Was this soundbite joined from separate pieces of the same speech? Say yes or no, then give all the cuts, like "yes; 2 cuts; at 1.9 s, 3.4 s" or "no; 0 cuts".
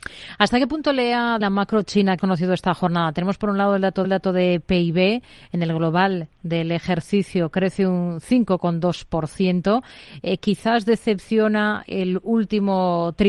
yes; 4 cuts; at 1.4 s, 2.2 s, 4.0 s, 11.9 s